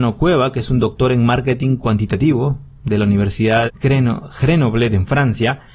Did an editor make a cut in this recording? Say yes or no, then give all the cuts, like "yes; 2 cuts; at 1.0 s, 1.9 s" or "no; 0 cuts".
yes; 1 cut; at 3.7 s